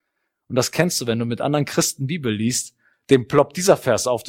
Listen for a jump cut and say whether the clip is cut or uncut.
uncut